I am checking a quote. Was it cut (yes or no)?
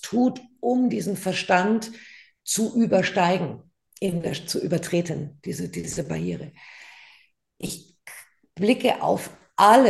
no